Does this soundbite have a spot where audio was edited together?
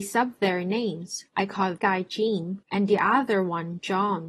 yes; 3 cuts; at 1.3 s, 1.8 s, 2.6 s

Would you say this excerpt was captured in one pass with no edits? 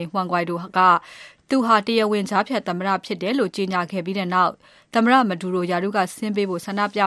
yes; 0 cuts

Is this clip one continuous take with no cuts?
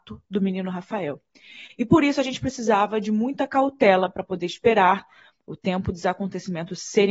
yes; 0 cuts

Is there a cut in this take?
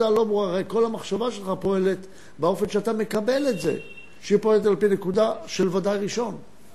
no; 0 cuts

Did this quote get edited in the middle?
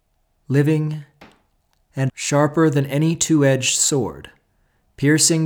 yes; 1 cut; at 2.1 s

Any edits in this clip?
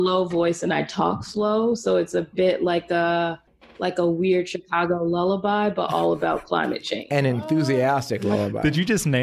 no; 0 cuts

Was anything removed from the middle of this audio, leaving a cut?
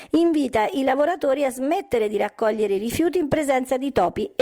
no; 0 cuts

